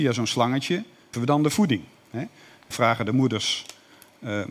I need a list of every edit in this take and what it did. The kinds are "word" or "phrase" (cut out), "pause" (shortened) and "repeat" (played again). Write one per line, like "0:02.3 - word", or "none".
0:01.1 - word
0:02.7 - word